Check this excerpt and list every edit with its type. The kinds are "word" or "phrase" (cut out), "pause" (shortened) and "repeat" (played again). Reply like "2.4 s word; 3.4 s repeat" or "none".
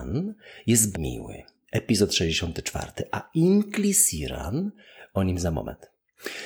0.9 s word